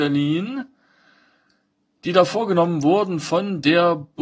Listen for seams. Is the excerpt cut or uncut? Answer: uncut